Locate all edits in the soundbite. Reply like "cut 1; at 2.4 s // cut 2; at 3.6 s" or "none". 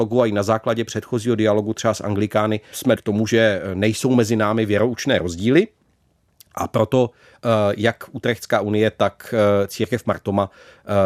cut 1; at 3.0 s